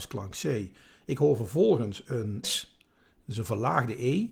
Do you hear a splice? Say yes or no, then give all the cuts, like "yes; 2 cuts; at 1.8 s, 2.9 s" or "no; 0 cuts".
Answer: yes; 1 cut; at 2.4 s